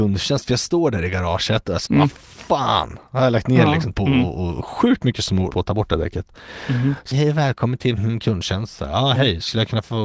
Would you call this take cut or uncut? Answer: cut